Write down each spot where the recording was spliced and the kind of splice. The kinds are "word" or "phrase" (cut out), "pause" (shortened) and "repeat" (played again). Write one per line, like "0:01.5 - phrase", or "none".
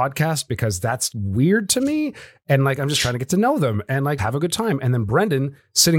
0:01.1 - word
0:04.2 - word